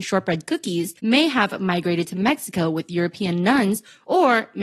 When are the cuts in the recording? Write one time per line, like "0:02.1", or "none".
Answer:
0:01.0